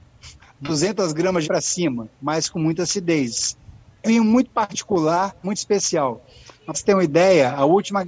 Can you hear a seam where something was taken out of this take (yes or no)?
yes